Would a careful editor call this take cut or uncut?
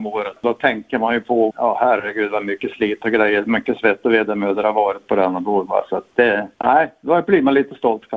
cut